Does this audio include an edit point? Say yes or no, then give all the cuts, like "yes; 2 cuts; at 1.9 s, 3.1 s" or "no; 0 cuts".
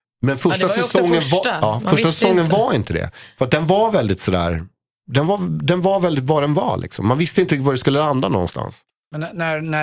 no; 0 cuts